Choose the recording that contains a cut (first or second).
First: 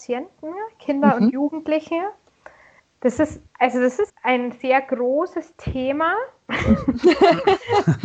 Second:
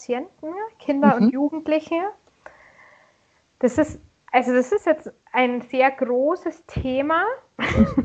first